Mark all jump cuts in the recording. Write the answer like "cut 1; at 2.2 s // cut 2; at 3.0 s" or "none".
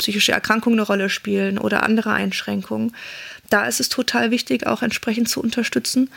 none